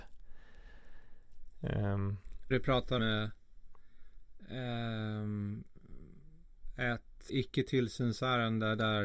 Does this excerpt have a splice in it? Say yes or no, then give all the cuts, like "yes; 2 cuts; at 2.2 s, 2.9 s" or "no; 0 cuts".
yes; 3 cuts; at 2.5 s, 3.0 s, 7.3 s